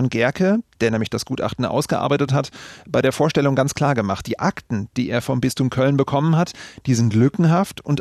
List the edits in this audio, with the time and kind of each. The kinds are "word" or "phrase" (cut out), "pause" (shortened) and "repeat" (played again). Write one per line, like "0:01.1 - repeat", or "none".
none